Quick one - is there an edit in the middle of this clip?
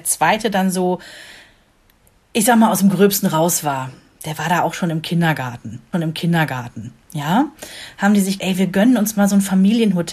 yes; 2 cuts; at 5.9 s, 8.4 s

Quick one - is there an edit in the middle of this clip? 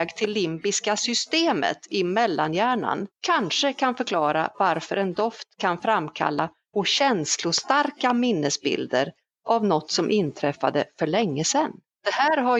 yes; 2 cuts; at 3.1 s, 6.7 s

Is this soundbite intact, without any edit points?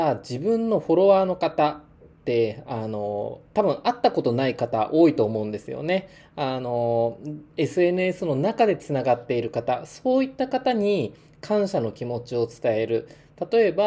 yes; 0 cuts

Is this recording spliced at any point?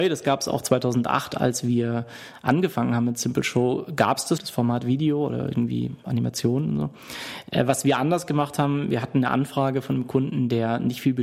yes; 1 cut; at 4.4 s

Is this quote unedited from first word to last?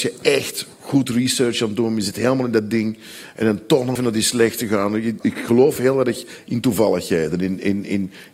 no; 2 cuts; at 4.0 s, 5.2 s

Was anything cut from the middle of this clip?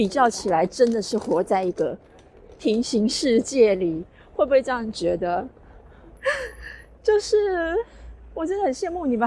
no; 0 cuts

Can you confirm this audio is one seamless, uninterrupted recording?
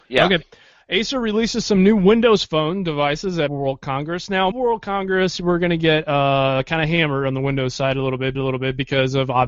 no; 3 cuts; at 3.5 s, 4.5 s, 8.3 s

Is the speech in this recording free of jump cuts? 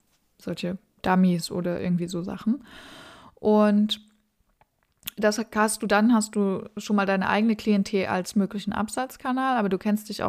yes; 0 cuts

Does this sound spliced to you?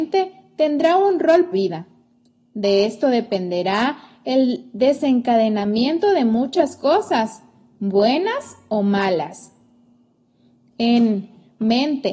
yes; 1 cut; at 1.5 s

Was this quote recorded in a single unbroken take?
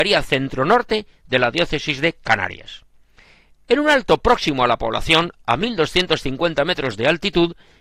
yes; 0 cuts

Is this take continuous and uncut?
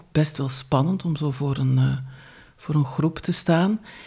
yes; 0 cuts

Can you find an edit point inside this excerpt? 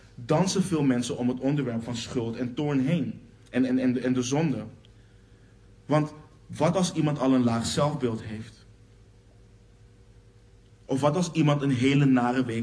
no; 0 cuts

